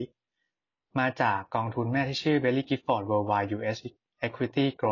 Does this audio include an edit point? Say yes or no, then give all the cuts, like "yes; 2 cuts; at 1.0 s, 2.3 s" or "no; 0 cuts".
no; 0 cuts